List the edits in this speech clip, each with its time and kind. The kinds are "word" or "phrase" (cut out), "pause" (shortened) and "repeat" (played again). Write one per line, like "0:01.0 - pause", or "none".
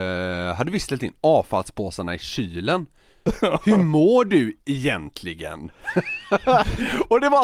none